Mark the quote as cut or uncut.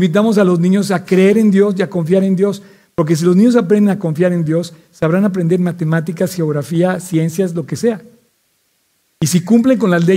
uncut